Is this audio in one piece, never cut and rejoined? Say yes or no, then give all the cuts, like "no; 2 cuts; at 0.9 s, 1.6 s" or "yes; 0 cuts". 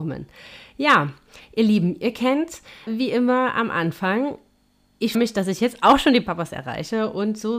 no; 2 cuts; at 2.9 s, 5.1 s